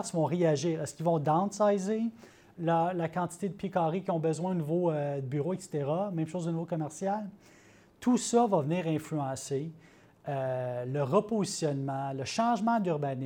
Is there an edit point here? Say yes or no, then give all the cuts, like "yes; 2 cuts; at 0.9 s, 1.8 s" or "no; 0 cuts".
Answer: no; 0 cuts